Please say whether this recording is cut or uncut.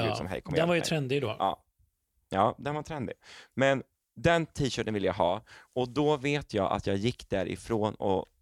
uncut